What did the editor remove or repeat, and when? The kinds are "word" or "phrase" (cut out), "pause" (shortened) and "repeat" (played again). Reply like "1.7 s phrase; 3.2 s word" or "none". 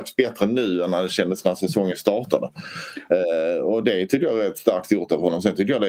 none

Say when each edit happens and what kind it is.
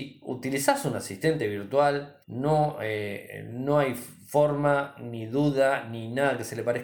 2.2 s pause

